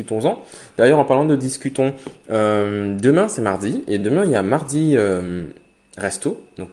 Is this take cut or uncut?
uncut